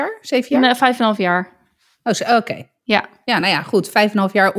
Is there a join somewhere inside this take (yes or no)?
no